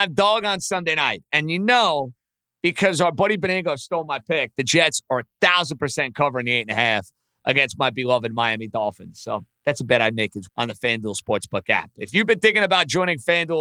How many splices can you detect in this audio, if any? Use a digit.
1